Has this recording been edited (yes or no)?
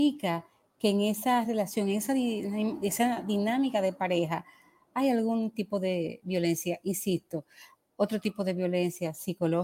no